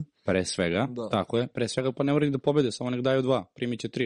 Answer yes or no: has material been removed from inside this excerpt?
no